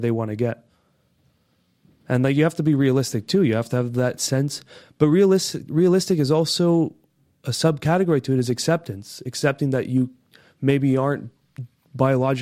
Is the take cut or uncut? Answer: uncut